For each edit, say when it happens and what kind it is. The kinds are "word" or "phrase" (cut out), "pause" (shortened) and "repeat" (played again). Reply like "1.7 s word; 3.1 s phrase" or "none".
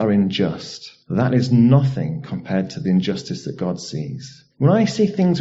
1.0 s pause; 4.5 s pause

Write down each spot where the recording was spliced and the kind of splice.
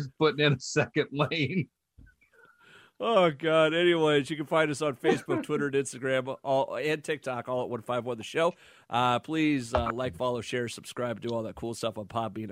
none

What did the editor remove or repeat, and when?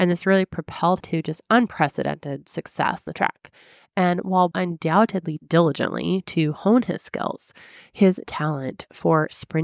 1.0 s word; 3.1 s word; 4.5 s word; 5.4 s word; 8.2 s word

